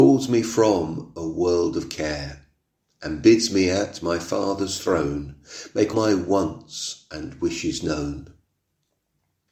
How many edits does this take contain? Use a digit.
1